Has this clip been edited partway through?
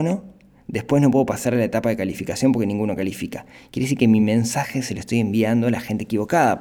no; 0 cuts

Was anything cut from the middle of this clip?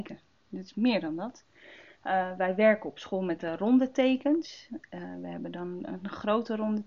no; 0 cuts

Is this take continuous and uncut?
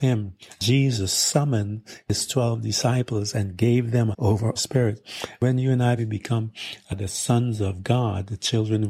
no; 3 cuts; at 4.1 s, 4.6 s, 6.0 s

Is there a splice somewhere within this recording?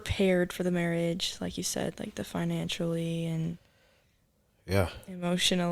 no; 0 cuts

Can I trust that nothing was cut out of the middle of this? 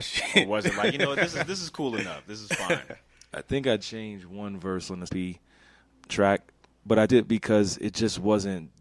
no; 4 cuts; at 3.8 s, 5.1 s, 5.9 s, 7.1 s

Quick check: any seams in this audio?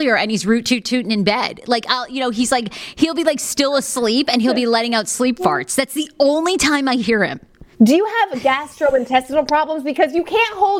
yes; 1 cut; at 7.7 s

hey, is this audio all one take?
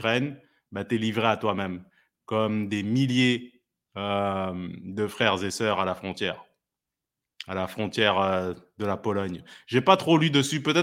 yes; 0 cuts

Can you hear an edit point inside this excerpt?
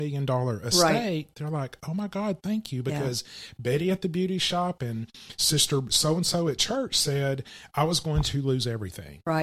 no; 0 cuts

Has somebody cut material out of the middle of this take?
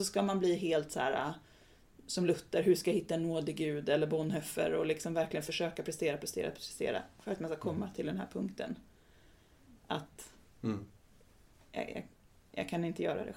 no; 0 cuts

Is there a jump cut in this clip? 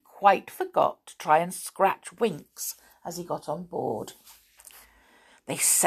no; 0 cuts

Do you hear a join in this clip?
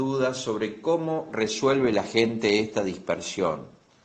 no; 0 cuts

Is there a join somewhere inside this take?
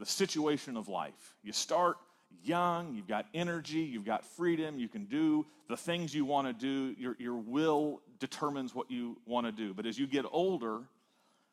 no; 0 cuts

